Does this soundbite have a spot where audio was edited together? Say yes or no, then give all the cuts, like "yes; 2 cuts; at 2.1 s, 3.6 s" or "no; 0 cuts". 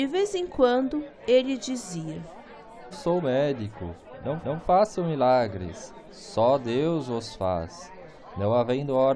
yes; 2 cuts; at 2.9 s, 4.4 s